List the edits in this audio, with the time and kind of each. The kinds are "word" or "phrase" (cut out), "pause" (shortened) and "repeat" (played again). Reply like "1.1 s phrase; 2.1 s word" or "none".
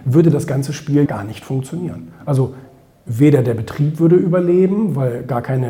1.1 s word